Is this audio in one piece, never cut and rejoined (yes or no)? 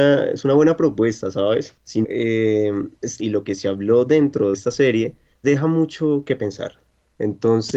no